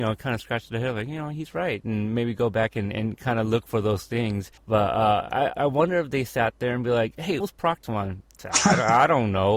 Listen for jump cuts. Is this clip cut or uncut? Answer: cut